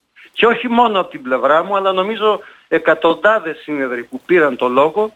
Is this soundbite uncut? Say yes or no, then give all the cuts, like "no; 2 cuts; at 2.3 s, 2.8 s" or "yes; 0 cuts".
yes; 0 cuts